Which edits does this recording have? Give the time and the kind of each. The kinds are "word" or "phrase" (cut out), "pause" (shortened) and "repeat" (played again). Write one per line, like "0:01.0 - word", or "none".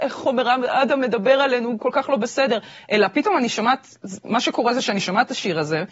none